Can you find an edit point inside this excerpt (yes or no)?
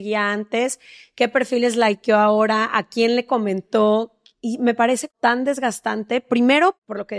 no